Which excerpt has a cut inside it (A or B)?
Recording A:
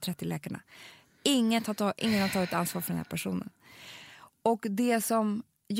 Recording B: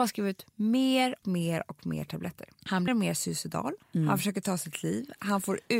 B